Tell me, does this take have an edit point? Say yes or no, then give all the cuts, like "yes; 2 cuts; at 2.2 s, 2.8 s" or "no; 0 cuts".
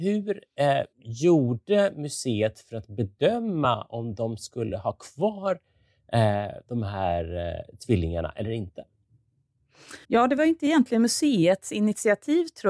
yes; 2 cuts; at 0.9 s, 10.0 s